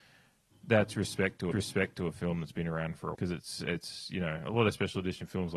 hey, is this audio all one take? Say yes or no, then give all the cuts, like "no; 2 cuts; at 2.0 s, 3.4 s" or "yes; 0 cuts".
no; 2 cuts; at 1.5 s, 3.1 s